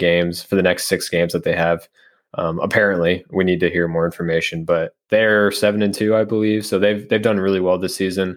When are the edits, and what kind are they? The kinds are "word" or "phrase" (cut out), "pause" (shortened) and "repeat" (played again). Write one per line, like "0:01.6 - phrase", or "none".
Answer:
none